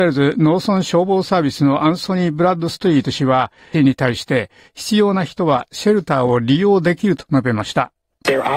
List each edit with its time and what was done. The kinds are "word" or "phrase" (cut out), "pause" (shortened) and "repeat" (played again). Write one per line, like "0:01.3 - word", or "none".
0:03.7 - word